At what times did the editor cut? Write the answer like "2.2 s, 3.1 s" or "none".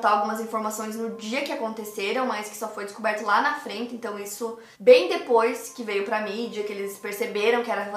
4.7 s